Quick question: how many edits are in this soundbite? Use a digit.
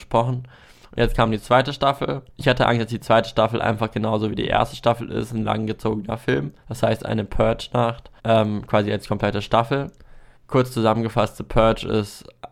4